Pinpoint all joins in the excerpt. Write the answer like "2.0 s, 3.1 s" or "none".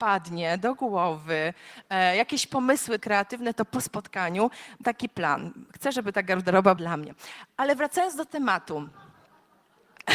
3.0 s, 4.8 s, 6.8 s